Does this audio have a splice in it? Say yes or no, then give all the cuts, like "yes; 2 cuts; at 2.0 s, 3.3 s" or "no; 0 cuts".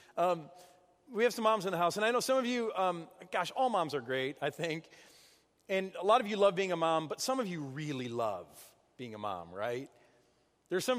no; 0 cuts